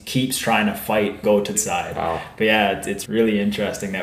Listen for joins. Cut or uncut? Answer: cut